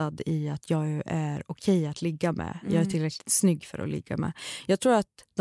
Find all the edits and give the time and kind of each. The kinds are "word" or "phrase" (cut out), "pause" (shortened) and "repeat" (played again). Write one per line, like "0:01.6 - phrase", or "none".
none

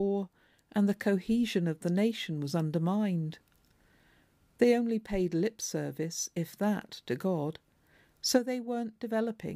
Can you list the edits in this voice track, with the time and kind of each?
none

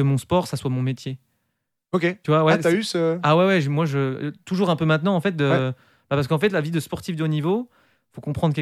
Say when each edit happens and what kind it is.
none

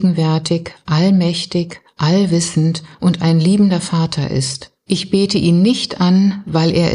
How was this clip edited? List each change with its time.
0:02.9 - pause
0:04.8 - pause

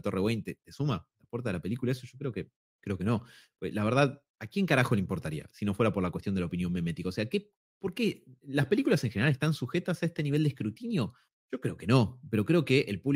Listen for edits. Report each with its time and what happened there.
none

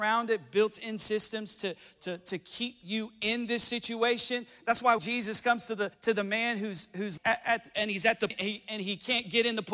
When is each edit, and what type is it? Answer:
0:05.0 - word
0:05.9 - pause
0:07.2 - word
0:08.3 - phrase

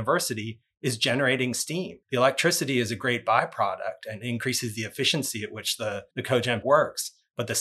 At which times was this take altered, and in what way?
0:02.0 - pause
0:06.1 - pause
0:06.6 - word

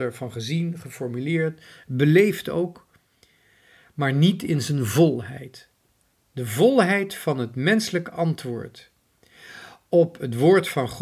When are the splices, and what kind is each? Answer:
none

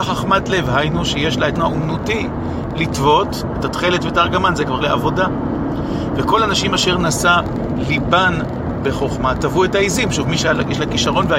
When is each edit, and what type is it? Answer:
0:01.6 - word
0:03.6 - word
0:04.8 - word
0:08.8 - word

